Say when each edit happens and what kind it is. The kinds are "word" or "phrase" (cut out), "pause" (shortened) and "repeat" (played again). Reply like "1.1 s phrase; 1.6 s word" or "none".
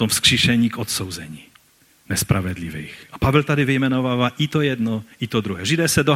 none